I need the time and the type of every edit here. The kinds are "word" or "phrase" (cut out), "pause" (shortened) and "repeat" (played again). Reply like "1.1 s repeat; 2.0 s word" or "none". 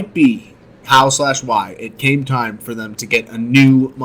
none